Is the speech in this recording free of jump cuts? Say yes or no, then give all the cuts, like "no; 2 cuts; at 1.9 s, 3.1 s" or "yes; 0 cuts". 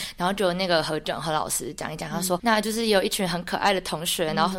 yes; 0 cuts